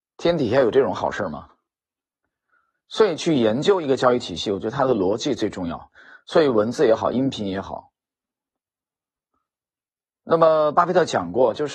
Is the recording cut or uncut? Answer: uncut